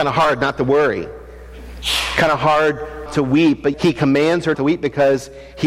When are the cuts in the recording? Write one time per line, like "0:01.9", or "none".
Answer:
0:03.1
0:03.7
0:04.5